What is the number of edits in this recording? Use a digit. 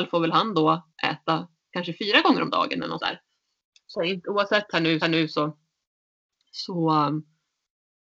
4